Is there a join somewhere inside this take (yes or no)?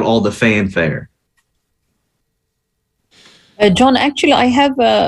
no